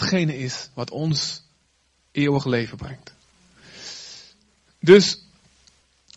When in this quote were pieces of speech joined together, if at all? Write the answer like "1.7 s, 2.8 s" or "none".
none